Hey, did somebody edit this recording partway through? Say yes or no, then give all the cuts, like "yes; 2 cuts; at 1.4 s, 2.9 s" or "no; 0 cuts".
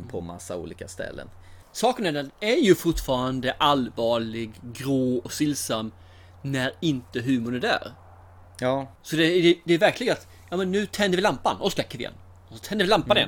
no; 0 cuts